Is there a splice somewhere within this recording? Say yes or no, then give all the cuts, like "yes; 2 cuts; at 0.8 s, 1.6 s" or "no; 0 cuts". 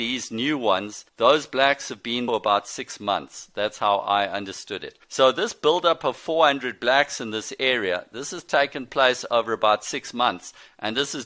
yes; 3 cuts; at 1.1 s, 2.3 s, 5.0 s